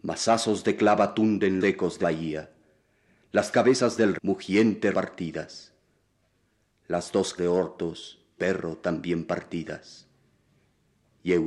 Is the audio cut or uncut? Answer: cut